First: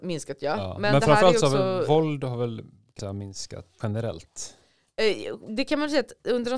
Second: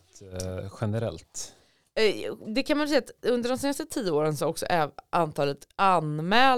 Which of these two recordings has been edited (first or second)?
first